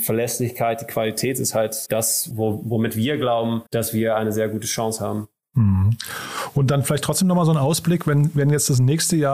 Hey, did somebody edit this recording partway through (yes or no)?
yes